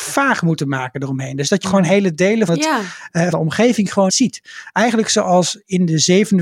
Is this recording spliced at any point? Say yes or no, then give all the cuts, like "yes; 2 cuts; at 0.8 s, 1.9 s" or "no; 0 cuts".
yes; 4 cuts; at 1.6 s, 2.5 s, 3.3 s, 4.1 s